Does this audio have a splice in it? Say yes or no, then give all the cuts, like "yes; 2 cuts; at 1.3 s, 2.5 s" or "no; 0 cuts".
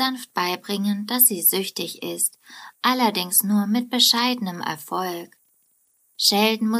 no; 0 cuts